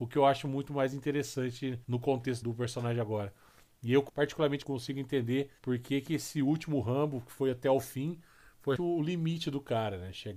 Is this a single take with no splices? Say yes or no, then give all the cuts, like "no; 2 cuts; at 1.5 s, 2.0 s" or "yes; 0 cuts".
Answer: no; 6 cuts; at 1.8 s, 2.4 s, 4.1 s, 4.6 s, 5.6 s, 8.8 s